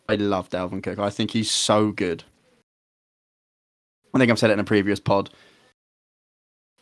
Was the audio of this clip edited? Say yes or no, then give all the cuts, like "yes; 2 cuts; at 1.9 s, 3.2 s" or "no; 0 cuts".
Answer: no; 0 cuts